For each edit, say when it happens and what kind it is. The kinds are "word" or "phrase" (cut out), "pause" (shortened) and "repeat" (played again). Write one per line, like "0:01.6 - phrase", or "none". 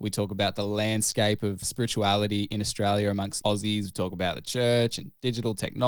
0:01.6 - word
0:03.4 - word